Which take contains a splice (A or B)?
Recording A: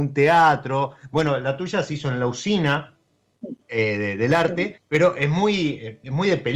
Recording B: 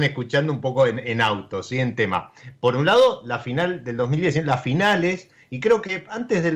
A